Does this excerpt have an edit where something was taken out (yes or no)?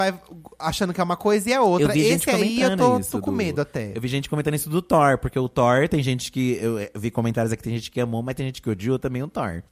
no